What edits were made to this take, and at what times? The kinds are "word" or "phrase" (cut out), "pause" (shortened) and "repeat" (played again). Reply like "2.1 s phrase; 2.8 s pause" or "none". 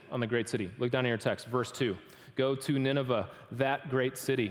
none